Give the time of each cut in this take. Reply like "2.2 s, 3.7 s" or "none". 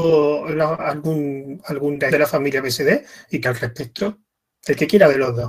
2.1 s, 3.4 s